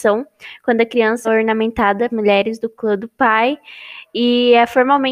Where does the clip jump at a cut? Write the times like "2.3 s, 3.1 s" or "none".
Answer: 1.2 s, 2.1 s